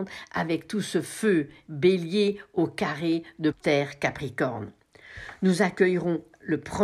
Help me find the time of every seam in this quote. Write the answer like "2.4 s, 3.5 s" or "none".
3.5 s